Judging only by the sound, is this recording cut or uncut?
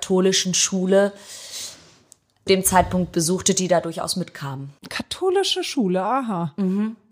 cut